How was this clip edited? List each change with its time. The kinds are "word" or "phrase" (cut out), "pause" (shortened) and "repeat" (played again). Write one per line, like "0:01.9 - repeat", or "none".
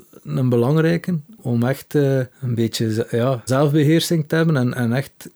0:01.4 - word
0:02.3 - pause
0:03.5 - word